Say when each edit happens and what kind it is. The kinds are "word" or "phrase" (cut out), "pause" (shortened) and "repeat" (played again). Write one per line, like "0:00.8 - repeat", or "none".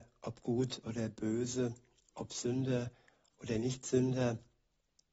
none